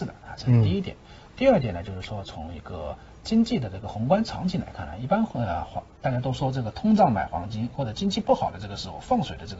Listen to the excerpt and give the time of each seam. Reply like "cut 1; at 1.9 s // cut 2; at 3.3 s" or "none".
none